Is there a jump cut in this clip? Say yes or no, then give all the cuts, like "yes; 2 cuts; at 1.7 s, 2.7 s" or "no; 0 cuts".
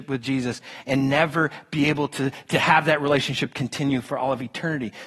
no; 0 cuts